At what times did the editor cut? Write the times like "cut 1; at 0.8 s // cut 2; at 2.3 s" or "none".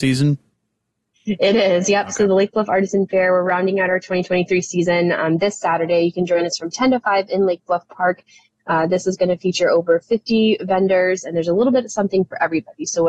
none